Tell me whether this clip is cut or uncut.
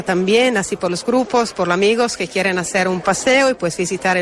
cut